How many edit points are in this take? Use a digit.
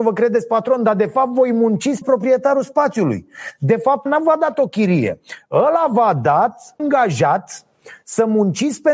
3